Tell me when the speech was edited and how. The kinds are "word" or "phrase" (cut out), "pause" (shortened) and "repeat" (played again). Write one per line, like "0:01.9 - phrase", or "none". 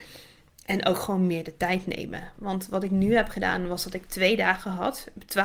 none